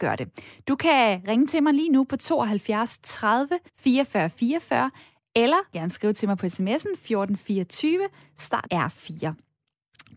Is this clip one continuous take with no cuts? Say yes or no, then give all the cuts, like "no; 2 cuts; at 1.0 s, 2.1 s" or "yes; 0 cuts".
no; 3 cuts; at 3.7 s, 5.7 s, 8.7 s